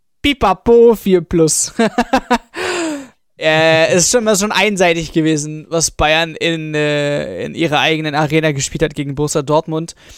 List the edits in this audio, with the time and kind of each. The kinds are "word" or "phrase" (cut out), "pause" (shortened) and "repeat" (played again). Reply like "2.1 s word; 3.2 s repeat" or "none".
none